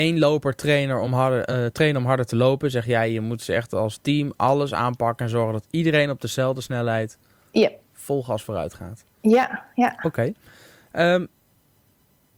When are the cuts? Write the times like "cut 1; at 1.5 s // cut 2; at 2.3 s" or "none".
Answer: none